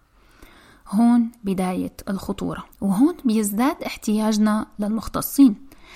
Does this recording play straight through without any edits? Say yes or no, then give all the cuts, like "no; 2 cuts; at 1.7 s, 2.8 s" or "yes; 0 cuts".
no; 1 cut; at 2.7 s